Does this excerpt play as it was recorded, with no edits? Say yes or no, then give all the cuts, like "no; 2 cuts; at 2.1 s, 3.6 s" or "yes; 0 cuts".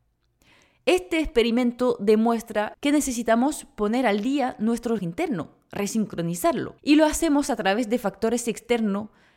no; 2 cuts; at 5.0 s, 6.8 s